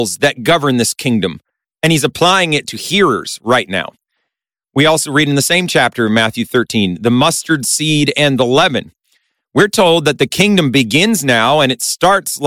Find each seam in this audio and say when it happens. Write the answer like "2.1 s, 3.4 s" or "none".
none